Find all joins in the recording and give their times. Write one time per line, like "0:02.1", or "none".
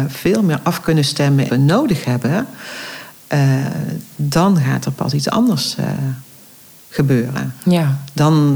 0:01.5